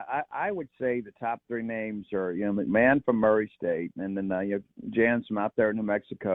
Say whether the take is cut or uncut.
uncut